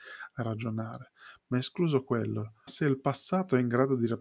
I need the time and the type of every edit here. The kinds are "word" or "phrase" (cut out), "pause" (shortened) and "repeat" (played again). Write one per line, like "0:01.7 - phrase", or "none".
0:02.7 - word